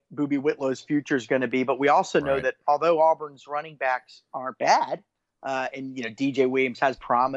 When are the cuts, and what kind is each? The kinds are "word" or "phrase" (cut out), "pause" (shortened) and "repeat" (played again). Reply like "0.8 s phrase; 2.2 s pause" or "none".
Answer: none